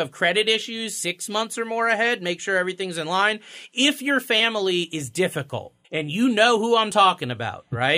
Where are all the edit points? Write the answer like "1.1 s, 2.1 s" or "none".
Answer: 5.8 s